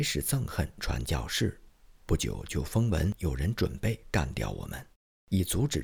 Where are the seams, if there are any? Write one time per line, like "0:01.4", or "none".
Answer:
none